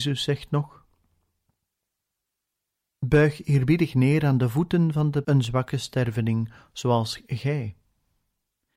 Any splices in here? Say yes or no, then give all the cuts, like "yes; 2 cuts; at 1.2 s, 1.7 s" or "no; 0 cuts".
yes; 1 cut; at 5.2 s